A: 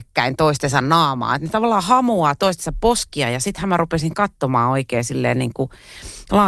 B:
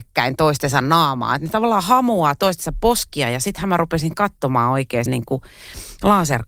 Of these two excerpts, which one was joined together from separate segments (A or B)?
B